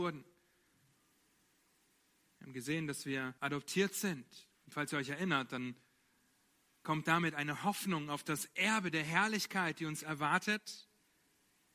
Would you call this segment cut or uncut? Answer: cut